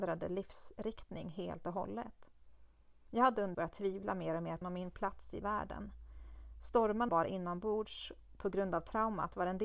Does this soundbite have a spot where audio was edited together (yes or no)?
yes